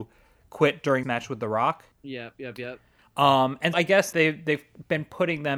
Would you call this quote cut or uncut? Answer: cut